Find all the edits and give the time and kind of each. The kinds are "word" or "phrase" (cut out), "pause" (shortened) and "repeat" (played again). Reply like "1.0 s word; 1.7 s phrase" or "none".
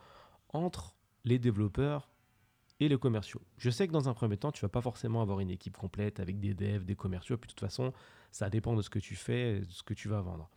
none